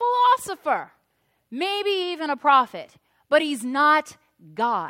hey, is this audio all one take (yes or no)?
yes